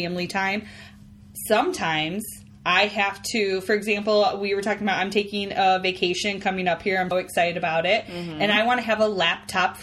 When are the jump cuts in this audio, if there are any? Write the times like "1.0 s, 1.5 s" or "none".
7.1 s